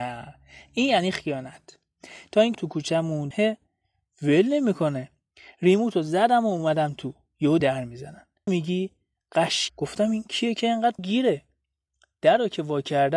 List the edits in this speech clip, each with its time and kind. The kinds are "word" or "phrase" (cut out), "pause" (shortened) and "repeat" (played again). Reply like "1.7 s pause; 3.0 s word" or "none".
2.5 s word; 3.3 s word; 7.6 s word; 8.5 s word; 9.7 s word; 11.0 s word